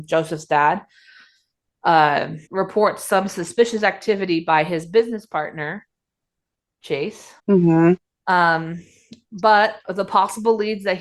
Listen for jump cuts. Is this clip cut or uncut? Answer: cut